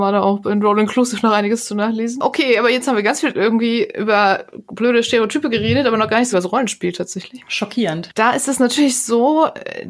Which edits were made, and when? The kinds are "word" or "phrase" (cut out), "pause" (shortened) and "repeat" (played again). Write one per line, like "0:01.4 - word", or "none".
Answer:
0:06.3 - word

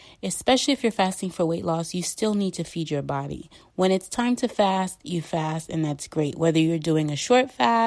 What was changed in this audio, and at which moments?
none

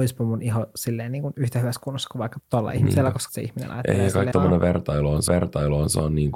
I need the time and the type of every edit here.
0:02.4 - word
0:03.3 - word
0:04.3 - word
0:05.3 - repeat

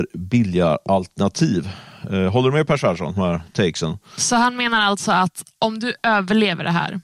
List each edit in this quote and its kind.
0:03.2 - word

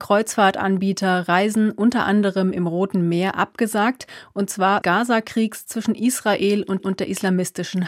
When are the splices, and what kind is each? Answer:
0:04.8 - phrase
0:06.8 - repeat

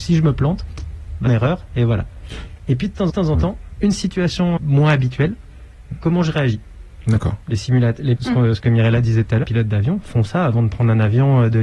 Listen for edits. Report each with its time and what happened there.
0:01.3 - phrase
0:03.1 - repeat
0:04.6 - word
0:08.2 - word
0:09.4 - word

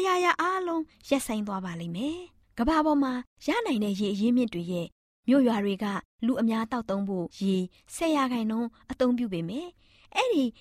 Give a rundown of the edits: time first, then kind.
0:07.3 - pause

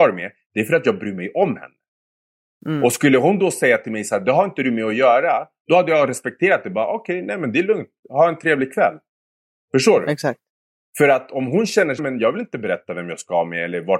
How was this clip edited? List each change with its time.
0:12.0 - word

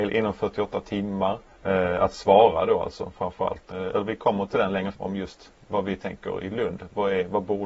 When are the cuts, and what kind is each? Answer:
0:01.5 - pause
0:04.9 - word

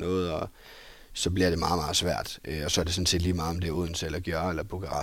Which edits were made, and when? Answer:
none

